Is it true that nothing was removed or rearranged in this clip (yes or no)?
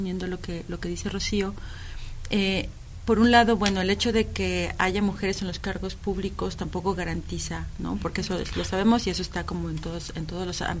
yes